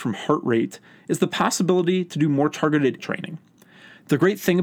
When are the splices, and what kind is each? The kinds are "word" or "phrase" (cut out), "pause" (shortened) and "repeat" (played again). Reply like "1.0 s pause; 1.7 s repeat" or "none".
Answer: 3.0 s word